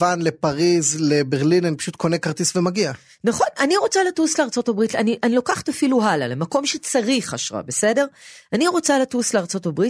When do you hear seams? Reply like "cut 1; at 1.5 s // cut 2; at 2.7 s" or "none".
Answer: none